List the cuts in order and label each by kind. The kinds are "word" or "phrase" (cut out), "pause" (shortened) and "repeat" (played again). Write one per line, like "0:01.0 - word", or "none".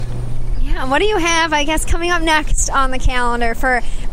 none